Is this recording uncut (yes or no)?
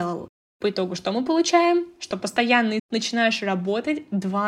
no